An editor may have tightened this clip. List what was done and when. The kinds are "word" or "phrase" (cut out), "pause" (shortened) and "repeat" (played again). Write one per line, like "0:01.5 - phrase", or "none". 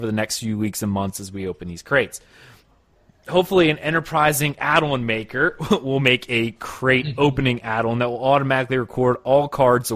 none